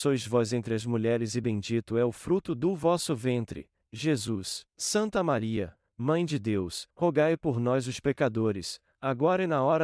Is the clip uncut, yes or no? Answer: no